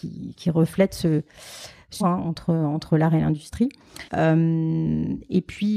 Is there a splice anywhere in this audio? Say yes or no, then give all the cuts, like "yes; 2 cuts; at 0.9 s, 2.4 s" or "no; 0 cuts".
yes; 2 cuts; at 2.0 s, 4.1 s